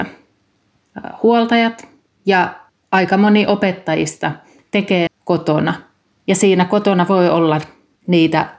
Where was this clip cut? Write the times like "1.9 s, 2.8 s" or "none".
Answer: 5.1 s